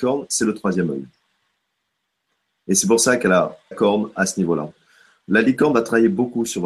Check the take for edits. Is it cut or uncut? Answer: cut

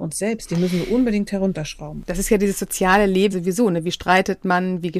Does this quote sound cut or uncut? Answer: cut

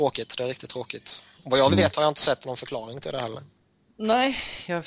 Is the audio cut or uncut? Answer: uncut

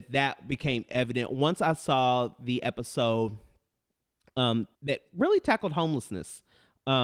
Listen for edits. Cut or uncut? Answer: cut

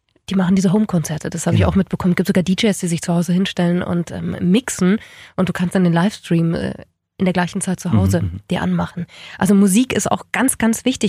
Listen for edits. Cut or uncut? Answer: uncut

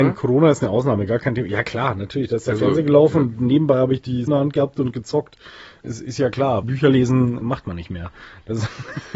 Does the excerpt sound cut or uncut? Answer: cut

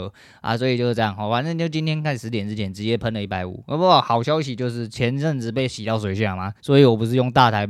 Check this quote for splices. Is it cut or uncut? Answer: cut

